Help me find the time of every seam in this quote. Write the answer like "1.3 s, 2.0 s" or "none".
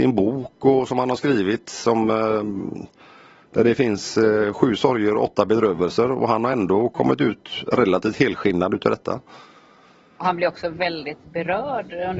none